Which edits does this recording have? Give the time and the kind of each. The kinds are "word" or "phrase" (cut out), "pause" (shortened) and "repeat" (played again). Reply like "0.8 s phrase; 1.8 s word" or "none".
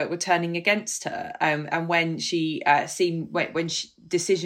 none